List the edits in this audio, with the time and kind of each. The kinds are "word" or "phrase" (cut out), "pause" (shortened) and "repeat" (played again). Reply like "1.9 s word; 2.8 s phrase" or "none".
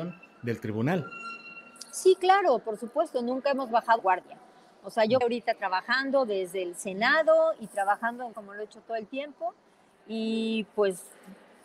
4.0 s word; 5.2 s word; 8.3 s word